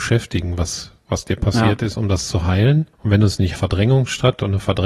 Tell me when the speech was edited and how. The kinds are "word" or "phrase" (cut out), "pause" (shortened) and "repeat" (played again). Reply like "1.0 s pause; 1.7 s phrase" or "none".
2.9 s pause; 3.6 s phrase